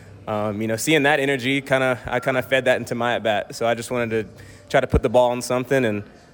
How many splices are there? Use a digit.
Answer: 0